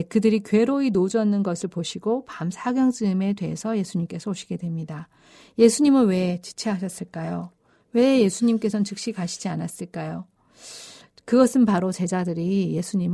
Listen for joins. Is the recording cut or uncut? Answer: uncut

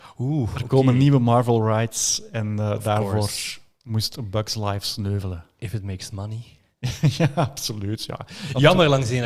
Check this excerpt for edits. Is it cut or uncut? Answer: uncut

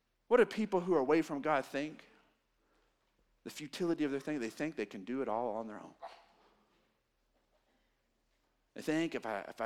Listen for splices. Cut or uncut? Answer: uncut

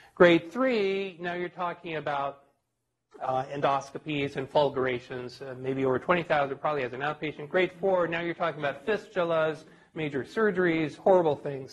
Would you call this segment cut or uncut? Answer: uncut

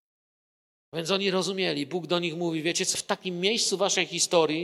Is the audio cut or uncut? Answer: cut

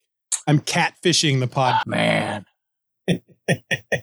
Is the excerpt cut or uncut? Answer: cut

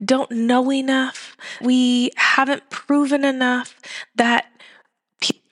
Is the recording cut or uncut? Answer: cut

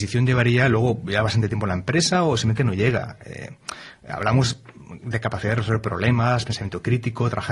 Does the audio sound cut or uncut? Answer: uncut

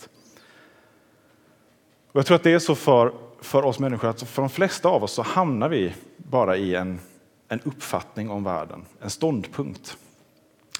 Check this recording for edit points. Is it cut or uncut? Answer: uncut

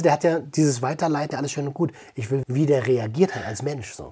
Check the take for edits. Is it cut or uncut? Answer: cut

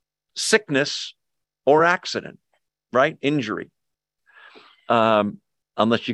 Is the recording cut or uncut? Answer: uncut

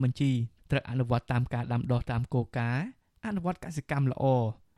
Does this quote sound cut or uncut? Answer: uncut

